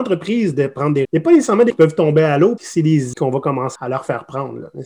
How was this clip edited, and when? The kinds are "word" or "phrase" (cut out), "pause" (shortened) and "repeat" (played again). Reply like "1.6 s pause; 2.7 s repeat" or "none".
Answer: 1.0 s word; 1.7 s word; 2.6 s word; 3.1 s word; 3.8 s word